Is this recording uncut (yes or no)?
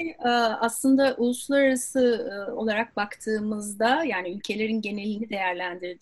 yes